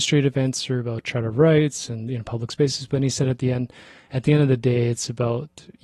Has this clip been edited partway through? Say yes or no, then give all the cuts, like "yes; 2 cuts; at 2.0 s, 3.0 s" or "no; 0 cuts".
no; 0 cuts